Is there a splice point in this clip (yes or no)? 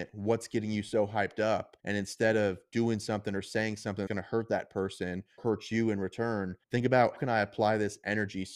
yes